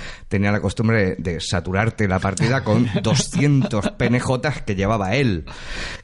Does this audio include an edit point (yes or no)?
no